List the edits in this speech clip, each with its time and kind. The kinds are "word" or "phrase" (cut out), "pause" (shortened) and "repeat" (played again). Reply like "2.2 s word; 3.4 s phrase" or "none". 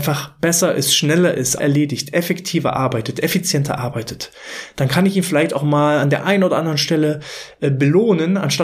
1.6 s phrase